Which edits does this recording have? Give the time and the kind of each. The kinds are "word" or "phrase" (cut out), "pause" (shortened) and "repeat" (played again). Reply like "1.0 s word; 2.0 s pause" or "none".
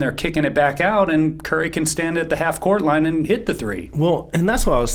none